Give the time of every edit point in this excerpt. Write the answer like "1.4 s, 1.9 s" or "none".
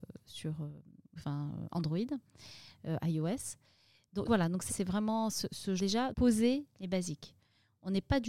1.2 s, 4.3 s, 4.7 s, 5.8 s, 6.1 s